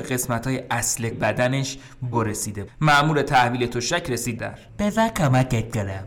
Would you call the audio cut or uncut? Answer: cut